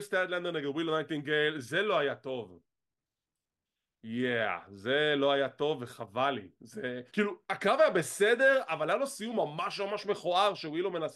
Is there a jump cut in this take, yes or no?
yes